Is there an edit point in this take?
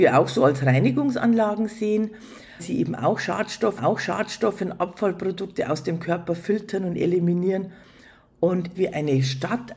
yes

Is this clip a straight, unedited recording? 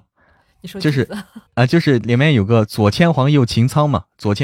no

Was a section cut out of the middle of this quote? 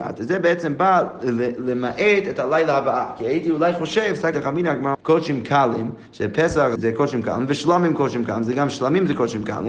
yes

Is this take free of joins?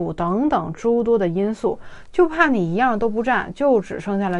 yes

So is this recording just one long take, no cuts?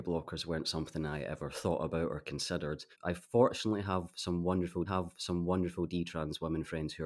no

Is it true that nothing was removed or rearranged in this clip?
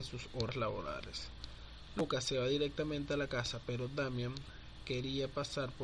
yes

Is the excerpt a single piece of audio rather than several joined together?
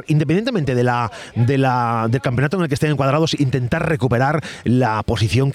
yes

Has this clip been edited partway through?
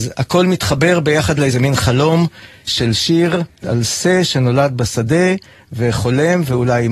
no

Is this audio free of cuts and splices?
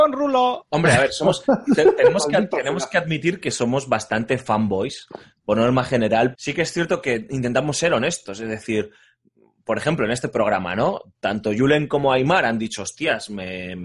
no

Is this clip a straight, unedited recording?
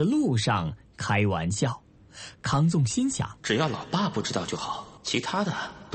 no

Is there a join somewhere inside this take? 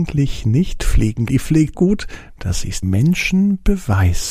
yes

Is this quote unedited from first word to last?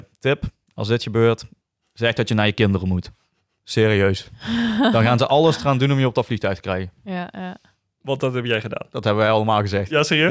yes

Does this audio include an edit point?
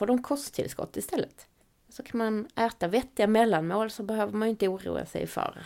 yes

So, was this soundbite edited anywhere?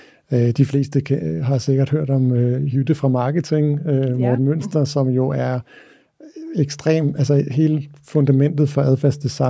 no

